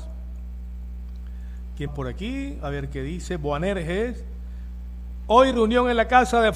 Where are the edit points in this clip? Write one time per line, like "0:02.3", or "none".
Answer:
0:01.9